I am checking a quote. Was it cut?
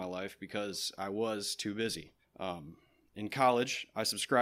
yes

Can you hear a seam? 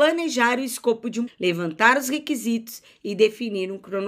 yes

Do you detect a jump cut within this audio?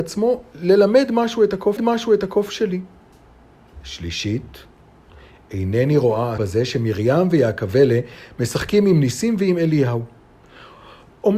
yes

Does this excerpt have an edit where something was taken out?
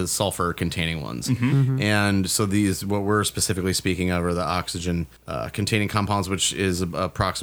yes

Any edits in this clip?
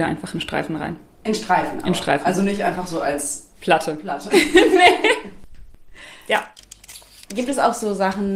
no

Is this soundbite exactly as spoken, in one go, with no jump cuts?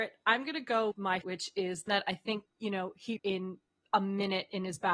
no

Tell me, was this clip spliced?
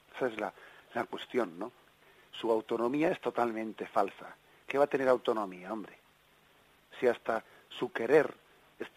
no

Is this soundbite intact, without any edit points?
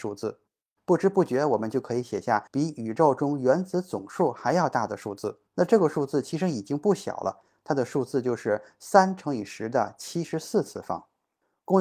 no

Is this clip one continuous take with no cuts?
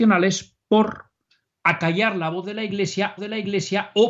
no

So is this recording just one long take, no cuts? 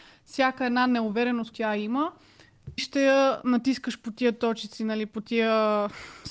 no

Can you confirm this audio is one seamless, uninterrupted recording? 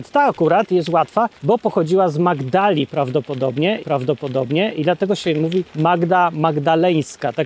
no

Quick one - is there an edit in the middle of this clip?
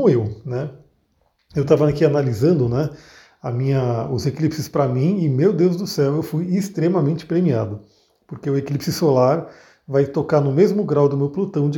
no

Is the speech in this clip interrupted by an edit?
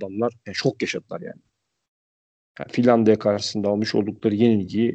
no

